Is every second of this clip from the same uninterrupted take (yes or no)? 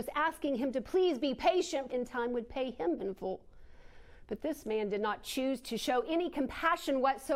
no